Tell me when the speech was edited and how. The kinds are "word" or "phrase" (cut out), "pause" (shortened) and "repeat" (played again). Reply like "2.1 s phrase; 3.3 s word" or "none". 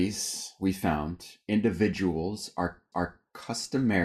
2.9 s repeat